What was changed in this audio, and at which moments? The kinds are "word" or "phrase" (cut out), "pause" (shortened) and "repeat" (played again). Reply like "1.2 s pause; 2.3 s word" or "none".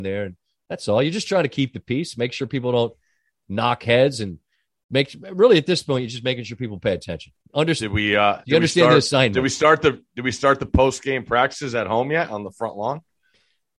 7.4 s pause